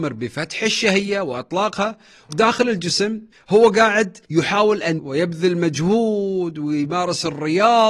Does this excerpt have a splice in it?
yes; 4 cuts; at 2.3 s, 3.3 s, 4.2 s, 5.0 s

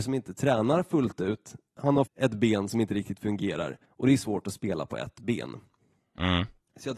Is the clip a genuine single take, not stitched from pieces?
no; 3 cuts; at 1.7 s, 2.1 s, 3.8 s

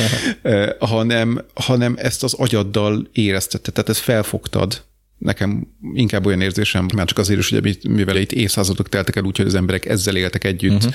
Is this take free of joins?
no; 2 cuts; at 6.9 s, 8.1 s

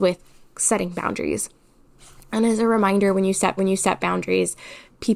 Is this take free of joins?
no; 1 cut; at 3.6 s

